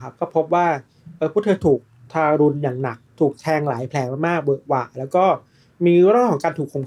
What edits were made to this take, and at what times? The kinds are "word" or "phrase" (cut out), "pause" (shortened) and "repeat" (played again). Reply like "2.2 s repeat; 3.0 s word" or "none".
3.1 s pause